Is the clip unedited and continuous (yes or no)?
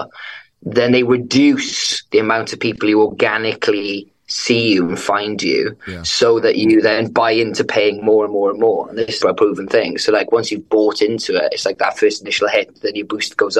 no